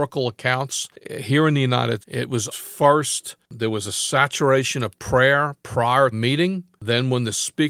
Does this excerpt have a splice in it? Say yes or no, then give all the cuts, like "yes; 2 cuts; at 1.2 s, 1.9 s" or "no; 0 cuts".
yes; 3 cuts; at 2.0 s, 2.5 s, 6.1 s